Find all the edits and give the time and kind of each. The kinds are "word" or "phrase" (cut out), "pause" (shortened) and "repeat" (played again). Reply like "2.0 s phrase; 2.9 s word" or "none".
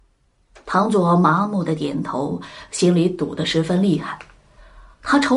none